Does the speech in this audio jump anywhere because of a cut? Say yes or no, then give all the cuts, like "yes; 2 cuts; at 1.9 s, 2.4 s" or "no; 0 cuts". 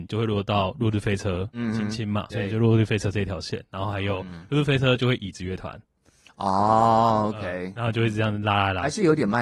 yes; 1 cut; at 2.3 s